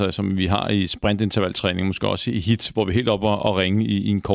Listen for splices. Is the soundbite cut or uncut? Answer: uncut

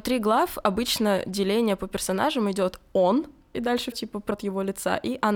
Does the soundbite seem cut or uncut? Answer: cut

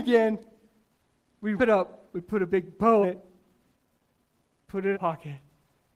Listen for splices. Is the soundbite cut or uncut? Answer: cut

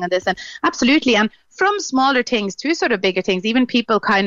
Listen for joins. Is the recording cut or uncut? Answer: uncut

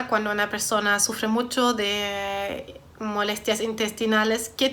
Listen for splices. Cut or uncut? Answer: uncut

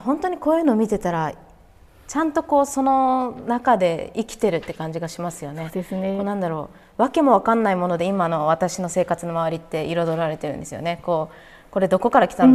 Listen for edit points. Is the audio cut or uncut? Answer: uncut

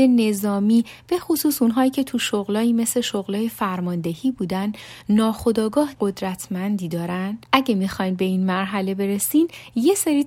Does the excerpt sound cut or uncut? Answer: cut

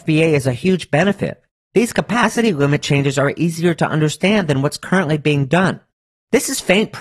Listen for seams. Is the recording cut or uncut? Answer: uncut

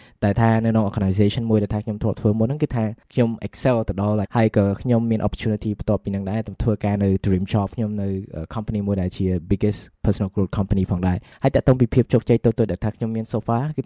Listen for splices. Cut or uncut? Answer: cut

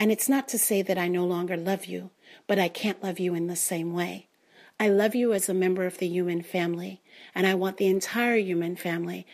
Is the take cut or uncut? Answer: uncut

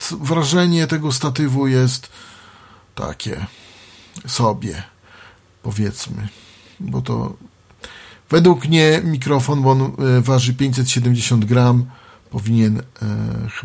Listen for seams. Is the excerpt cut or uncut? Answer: uncut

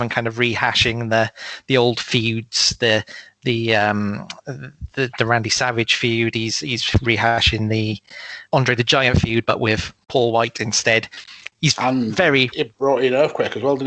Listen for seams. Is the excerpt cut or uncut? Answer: cut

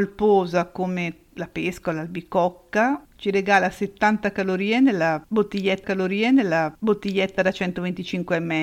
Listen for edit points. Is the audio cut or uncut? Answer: cut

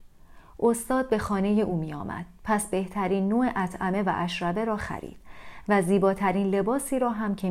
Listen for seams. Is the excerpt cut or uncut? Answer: uncut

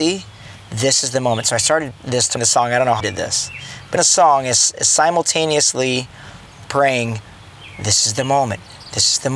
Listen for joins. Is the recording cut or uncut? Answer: cut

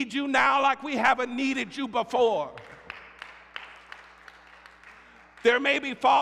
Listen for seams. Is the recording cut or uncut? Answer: uncut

